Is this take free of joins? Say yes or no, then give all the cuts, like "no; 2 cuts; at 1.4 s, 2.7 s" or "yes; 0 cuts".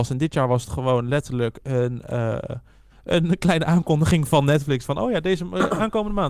yes; 0 cuts